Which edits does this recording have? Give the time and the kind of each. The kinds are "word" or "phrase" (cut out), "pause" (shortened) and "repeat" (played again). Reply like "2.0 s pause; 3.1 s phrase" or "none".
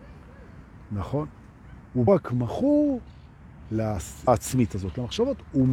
2.1 s phrase; 4.3 s word